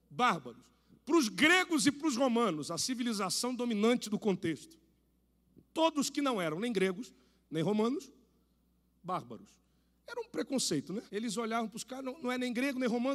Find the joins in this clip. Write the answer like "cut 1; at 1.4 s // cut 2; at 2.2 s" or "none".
cut 1; at 11.1 s